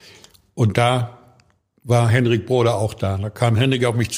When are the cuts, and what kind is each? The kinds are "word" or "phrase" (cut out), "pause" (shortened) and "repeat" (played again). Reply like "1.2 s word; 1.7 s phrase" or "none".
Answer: none